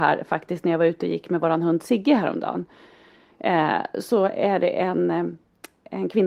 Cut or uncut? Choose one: uncut